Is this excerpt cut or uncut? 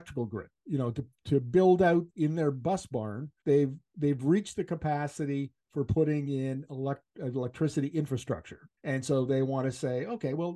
cut